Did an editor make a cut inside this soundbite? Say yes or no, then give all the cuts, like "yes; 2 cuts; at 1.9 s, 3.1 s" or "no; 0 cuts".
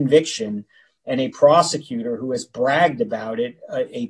no; 0 cuts